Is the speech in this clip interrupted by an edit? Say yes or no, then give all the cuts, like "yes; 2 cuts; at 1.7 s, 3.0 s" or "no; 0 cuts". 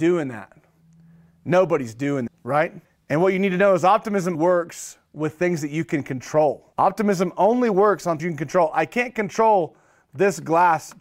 yes; 5 cuts; at 2.3 s, 2.8 s, 4.3 s, 6.7 s, 8.2 s